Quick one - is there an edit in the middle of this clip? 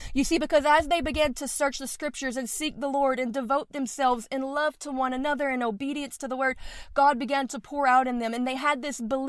no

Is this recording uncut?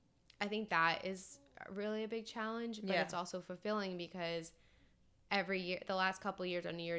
yes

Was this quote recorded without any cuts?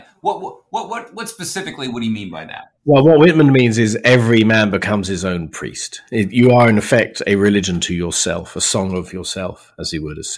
no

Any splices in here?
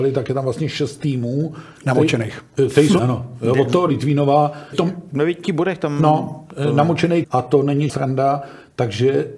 yes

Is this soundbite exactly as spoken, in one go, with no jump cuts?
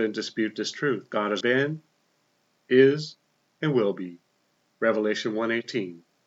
no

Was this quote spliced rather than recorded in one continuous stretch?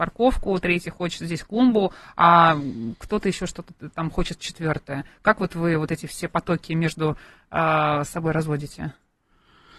no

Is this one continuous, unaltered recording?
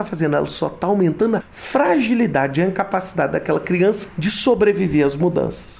yes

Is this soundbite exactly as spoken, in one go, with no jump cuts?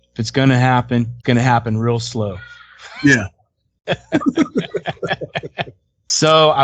no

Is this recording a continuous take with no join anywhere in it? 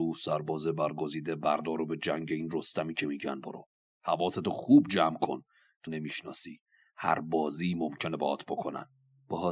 no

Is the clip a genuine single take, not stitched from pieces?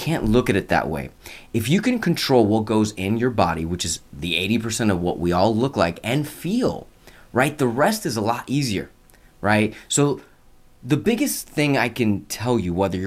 yes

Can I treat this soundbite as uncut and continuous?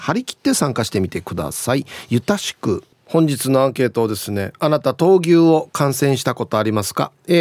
no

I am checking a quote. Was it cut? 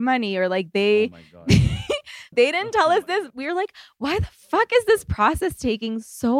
yes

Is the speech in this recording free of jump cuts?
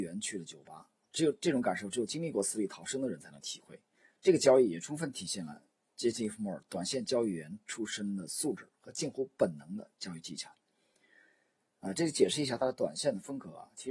yes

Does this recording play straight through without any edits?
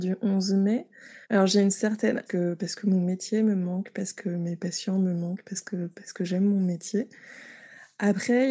no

